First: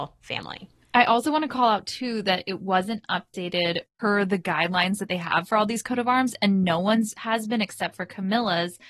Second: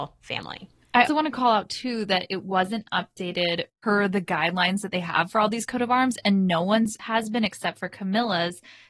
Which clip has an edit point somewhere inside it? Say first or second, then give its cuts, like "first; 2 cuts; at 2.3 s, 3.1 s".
second; 1 cut; at 1.1 s